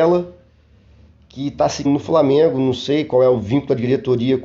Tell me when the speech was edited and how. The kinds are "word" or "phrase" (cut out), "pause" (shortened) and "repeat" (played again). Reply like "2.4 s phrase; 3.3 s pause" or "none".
1.8 s word